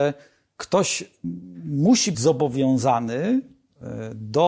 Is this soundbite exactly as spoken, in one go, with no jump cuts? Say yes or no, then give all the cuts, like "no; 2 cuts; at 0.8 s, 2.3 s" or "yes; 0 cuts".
no; 1 cut; at 2.1 s